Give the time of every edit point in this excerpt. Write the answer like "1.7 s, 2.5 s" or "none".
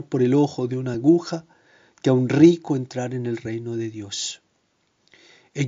none